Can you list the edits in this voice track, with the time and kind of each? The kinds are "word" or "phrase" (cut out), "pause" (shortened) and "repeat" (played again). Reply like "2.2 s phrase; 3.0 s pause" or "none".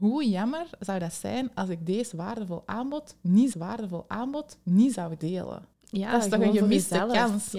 3.5 s repeat; 5.7 s pause